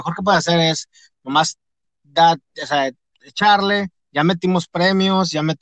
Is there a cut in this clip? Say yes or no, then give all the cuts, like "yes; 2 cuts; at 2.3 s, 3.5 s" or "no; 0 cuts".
no; 0 cuts